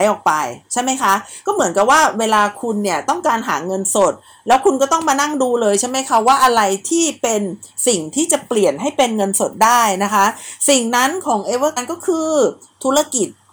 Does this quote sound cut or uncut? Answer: cut